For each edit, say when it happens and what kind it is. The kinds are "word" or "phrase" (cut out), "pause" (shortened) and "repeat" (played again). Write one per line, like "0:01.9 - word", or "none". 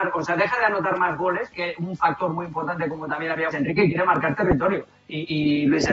0:03.5 - phrase